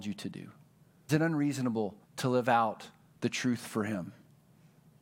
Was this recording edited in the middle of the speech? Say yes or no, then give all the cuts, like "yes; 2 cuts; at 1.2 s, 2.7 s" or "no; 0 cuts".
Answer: yes; 2 cuts; at 1.1 s, 2.0 s